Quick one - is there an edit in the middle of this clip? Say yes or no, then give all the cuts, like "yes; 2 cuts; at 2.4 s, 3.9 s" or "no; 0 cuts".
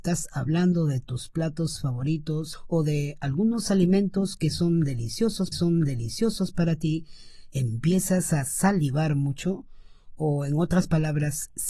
yes; 1 cut; at 5.5 s